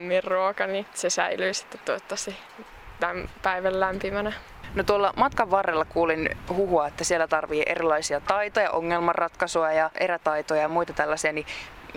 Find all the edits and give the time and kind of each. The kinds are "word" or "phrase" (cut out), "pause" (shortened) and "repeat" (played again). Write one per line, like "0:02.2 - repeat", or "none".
none